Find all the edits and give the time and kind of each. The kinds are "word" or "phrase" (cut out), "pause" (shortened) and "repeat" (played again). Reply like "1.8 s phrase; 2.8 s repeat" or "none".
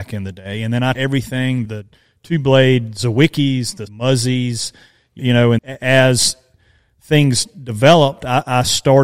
0.9 s word; 1.6 s word; 3.9 s phrase; 5.2 s word; 5.6 s word